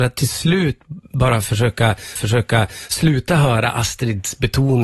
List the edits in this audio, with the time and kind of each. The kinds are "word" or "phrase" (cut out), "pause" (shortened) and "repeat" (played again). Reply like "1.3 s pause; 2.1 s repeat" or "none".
2.2 s repeat